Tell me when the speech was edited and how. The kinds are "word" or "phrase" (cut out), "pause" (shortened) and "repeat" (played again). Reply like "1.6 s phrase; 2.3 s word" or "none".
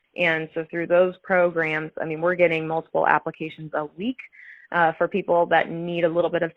none